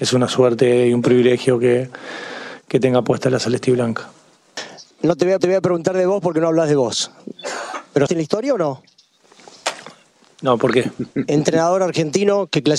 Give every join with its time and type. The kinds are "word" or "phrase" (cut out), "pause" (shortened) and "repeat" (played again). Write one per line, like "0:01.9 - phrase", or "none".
0:04.9 - pause
0:05.4 - repeat
0:08.1 - phrase